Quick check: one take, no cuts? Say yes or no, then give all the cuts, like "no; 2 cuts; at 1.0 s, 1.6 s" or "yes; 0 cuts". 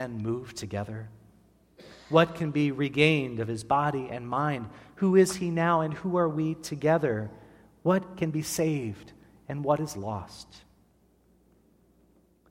yes; 0 cuts